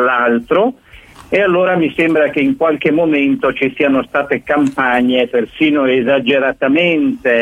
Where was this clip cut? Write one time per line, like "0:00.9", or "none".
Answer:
none

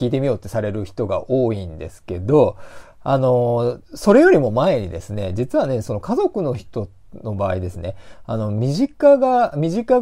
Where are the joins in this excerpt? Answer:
0:03.8

